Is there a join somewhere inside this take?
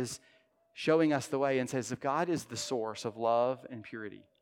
no; 0 cuts

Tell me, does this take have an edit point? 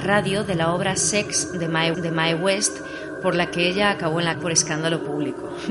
yes; 2 cuts; at 1.9 s, 4.3 s

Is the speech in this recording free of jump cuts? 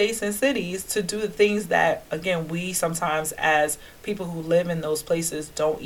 yes; 0 cuts

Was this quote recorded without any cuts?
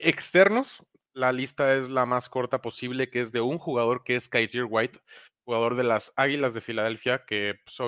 yes; 0 cuts

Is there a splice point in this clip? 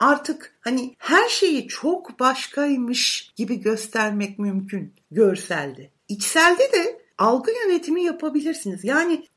yes; 1 cut; at 6.0 s

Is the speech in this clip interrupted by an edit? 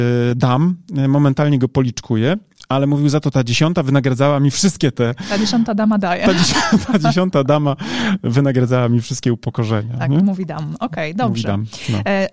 no; 0 cuts

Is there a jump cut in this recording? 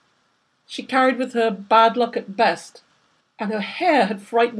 yes; 1 cut; at 3.2 s

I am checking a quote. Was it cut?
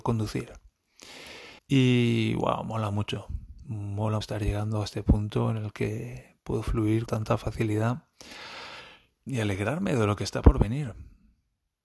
yes; 4 cuts; at 1.6 s, 4.2 s, 7.1 s, 9.3 s

